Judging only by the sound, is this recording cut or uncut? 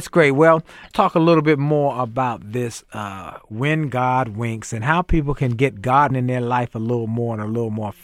cut